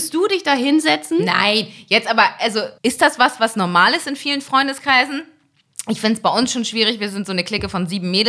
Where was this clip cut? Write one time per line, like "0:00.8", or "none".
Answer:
0:02.8